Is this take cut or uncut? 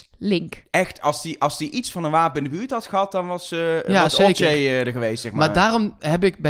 uncut